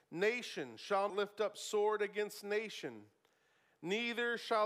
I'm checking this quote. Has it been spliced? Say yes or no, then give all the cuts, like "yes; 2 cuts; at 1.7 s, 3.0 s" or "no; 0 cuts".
yes; 1 cut; at 1.1 s